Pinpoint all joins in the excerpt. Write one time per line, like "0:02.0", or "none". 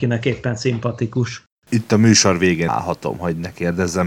0:02.7